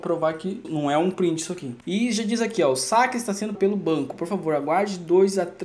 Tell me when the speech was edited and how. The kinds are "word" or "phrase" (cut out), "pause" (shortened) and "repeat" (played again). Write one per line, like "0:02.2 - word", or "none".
0:03.5 - word